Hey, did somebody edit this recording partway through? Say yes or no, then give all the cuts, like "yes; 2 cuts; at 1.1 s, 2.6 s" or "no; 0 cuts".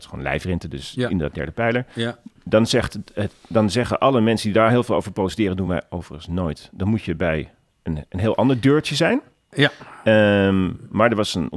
no; 0 cuts